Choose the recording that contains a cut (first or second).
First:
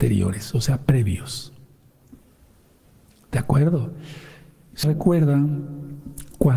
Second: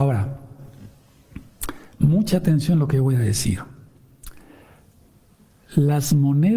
first